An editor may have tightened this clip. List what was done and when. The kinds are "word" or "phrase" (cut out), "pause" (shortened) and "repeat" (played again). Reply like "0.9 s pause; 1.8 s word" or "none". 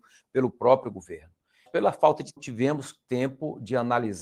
1.7 s word; 2.4 s phrase